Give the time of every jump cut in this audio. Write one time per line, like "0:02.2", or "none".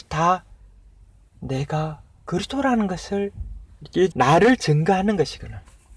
0:04.1